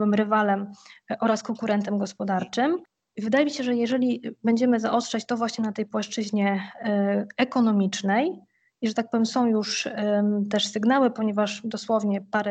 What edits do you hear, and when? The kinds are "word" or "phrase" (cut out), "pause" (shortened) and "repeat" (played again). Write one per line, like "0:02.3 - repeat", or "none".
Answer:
none